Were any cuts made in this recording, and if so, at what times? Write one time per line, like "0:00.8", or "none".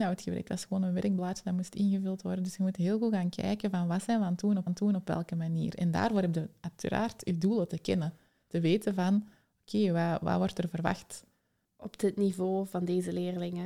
0:04.7